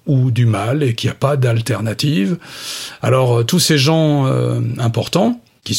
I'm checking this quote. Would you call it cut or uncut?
uncut